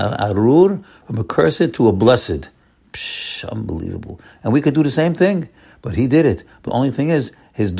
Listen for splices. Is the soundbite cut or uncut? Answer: cut